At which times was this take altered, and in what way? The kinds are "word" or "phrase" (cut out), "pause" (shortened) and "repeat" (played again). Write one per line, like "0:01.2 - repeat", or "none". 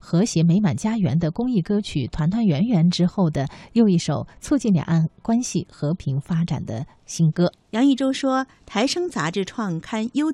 0:07.6 - pause